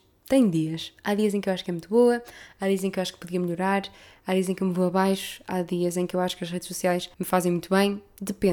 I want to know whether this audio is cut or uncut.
cut